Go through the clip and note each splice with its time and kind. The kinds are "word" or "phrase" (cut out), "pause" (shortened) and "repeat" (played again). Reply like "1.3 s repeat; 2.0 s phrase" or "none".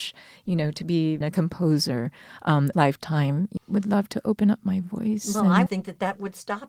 1.2 s phrase; 2.7 s phrase; 3.6 s phrase; 5.7 s word

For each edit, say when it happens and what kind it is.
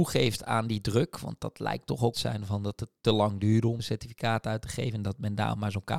2.1 s phrase; 3.8 s word

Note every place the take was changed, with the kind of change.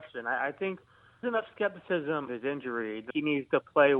1.2 s word; 2.3 s word; 3.1 s phrase

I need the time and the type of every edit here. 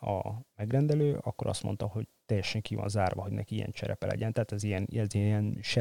none

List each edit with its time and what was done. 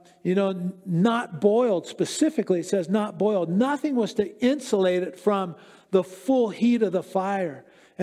none

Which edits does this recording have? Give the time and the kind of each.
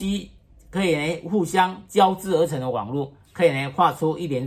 3.2 s pause

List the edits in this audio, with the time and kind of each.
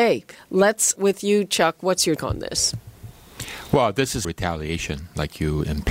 1.0 s word; 2.2 s word; 4.2 s phrase

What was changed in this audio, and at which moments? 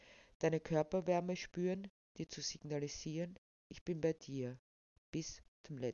none

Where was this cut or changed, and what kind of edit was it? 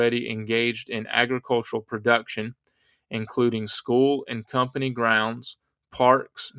none

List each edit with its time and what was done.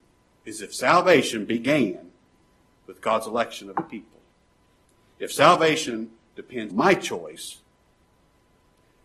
6.7 s word

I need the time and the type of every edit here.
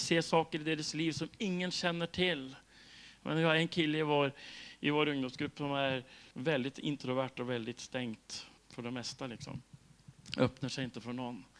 6.3 s pause; 8.6 s pause

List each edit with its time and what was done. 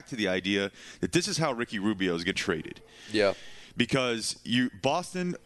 2.3 s phrase

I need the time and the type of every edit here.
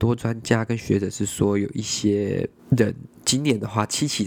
2.6 s pause

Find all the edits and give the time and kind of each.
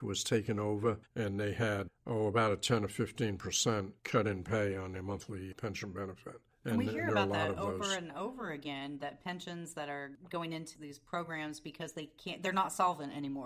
1.1 s pause; 4.0 s pause; 10.7 s word

